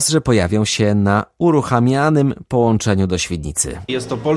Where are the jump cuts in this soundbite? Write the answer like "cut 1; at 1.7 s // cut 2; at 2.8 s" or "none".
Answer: none